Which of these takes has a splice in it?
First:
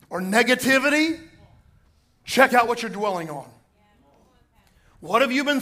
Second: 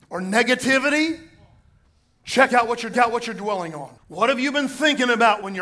second; 2 cuts; at 2.9 s, 4.0 s

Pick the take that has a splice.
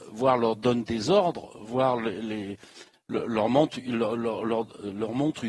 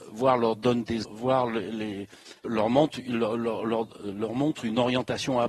second; 2 cuts; at 1.0 s, 2.4 s

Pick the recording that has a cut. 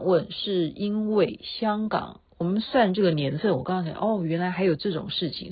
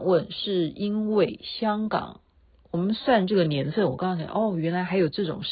first; 1 cut; at 2.3 s

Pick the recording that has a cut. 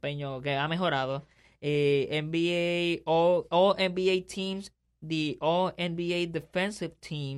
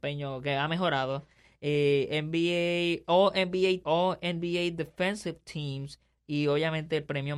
second; 2 cuts; at 3.0 s, 3.8 s

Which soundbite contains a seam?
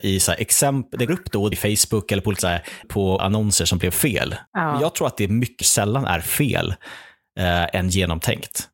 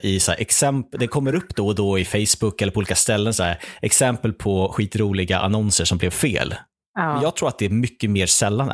first; 7 cuts; at 1.1 s, 1.5 s, 2.4 s, 2.8 s, 3.2 s, 4.5 s, 5.6 s

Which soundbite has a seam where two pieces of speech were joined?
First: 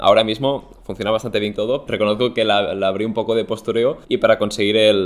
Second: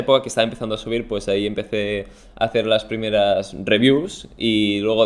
first; 3 cuts; at 1.5 s, 1.9 s, 4.0 s

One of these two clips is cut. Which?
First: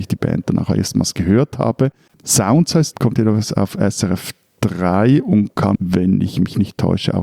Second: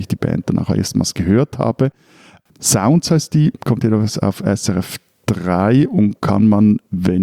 first; 3 cuts; at 2.1 s, 2.9 s, 5.8 s

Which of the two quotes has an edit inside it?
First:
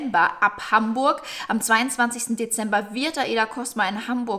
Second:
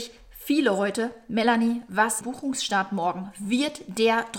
second; 1 cut; at 2.2 s

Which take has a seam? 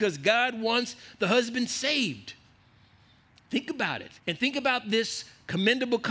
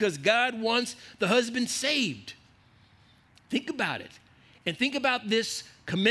first; 1 cut; at 4.2 s

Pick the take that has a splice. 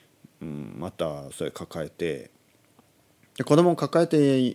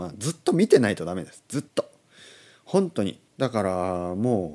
second; 2 cuts; at 1.7 s, 3.3 s

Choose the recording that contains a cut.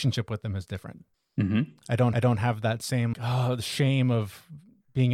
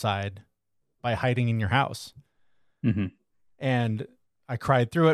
first; 3 cuts; at 1.1 s, 2.1 s, 3.1 s

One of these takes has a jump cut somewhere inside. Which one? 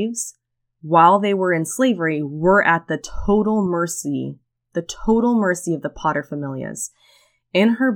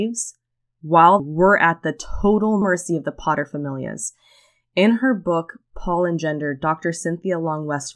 second; 2 cuts; at 1.2 s, 2.6 s

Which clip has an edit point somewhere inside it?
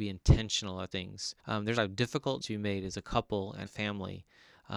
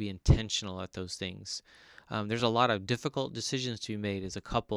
first; 5 cuts; at 0.9 s, 1.4 s, 1.8 s, 2.4 s, 3.7 s

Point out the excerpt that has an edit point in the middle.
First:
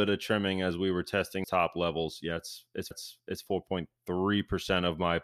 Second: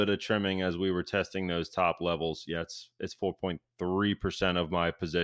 first; 2 cuts; at 1.4 s, 2.9 s

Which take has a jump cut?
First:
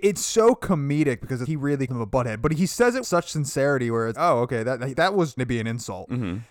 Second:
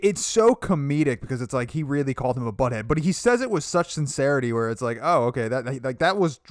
first; 6 cuts; at 1.4 s, 1.9 s, 3.0 s, 4.1 s, 4.9 s, 5.4 s

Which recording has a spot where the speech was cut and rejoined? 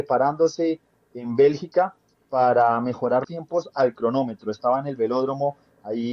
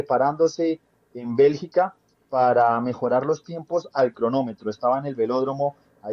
first; 1 cut; at 3.2 s

